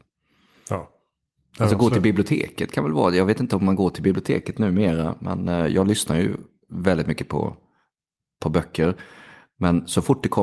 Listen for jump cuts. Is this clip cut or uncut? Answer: uncut